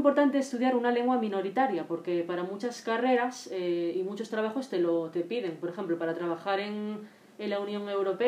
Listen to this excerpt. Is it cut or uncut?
uncut